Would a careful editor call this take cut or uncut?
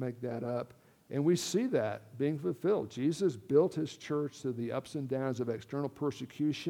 uncut